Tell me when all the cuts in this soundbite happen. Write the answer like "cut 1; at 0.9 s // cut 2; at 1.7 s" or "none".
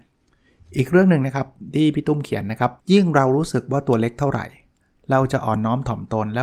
cut 1; at 2.8 s